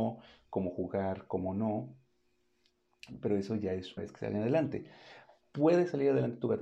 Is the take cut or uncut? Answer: cut